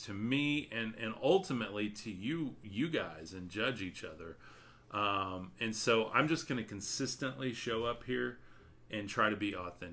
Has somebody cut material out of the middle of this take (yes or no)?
no